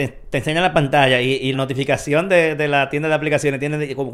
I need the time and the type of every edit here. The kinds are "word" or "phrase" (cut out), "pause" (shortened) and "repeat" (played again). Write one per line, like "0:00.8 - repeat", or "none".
0:01.5 - word